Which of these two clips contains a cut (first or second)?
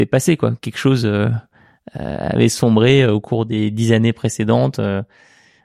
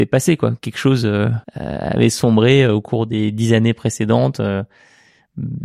second